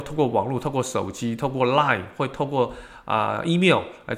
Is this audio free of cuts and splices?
yes; 0 cuts

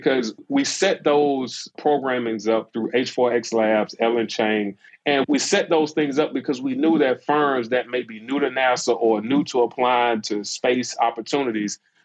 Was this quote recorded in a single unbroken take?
no; 1 cut; at 4.9 s

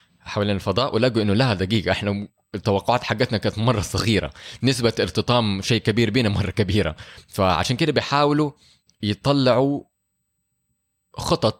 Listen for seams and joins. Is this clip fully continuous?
yes; 0 cuts

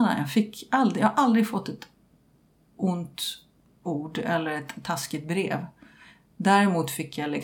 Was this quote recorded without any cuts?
yes; 0 cuts

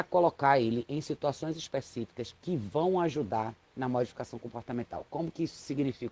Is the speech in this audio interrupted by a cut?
no; 0 cuts

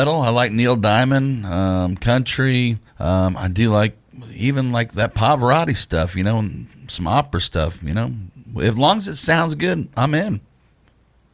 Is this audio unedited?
no; 1 cut; at 2.9 s

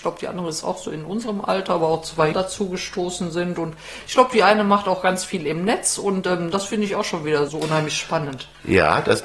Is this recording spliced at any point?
yes; 2 cuts; at 2.3 s, 7.5 s

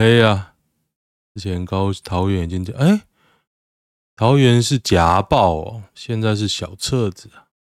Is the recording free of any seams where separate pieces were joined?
no; 1 cut; at 5.9 s

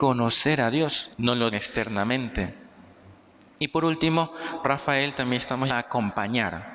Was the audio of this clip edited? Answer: yes; 4 cuts; at 1.1 s, 1.5 s, 4.6 s, 5.7 s

